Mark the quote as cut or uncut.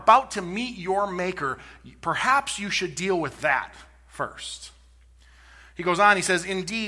uncut